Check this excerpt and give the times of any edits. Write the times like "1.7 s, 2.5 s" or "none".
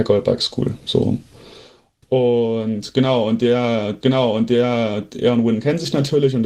4.0 s